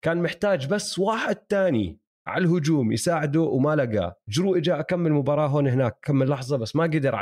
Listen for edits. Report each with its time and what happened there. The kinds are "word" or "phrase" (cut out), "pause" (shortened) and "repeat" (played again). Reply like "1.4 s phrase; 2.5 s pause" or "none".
none